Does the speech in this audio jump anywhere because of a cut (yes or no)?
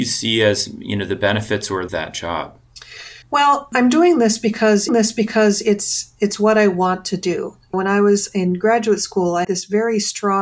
yes